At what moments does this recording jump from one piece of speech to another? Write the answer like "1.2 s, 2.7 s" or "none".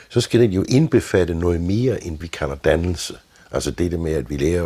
2.2 s